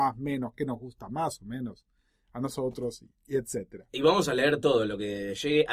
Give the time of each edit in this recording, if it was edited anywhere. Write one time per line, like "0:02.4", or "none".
none